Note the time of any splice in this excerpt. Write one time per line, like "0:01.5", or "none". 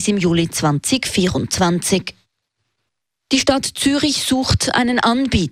none